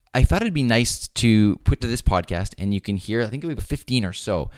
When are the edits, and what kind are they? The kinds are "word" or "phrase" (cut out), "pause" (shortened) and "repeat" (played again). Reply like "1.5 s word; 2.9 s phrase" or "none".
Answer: 1.8 s word; 3.6 s word